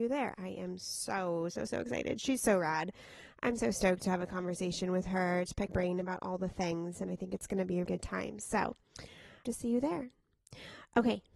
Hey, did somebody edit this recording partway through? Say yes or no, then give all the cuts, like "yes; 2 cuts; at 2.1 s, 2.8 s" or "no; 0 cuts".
yes; 3 cuts; at 5.7 s, 7.8 s, 9.4 s